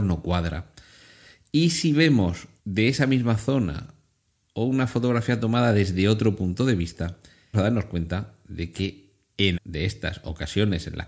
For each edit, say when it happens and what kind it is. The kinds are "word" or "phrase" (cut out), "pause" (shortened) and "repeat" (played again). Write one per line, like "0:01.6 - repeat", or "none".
0:02.6 - pause
0:07.5 - word
0:09.5 - word